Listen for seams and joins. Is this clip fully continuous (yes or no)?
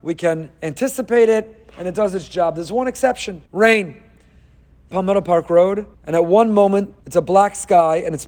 no